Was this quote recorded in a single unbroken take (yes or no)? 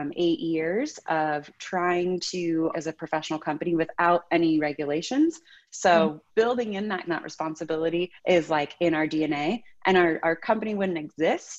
no